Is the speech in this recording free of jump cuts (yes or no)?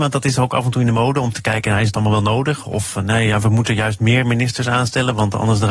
yes